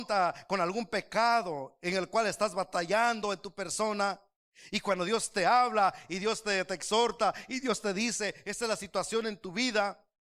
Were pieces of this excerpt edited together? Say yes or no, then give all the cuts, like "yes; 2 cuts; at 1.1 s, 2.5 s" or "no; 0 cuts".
no; 0 cuts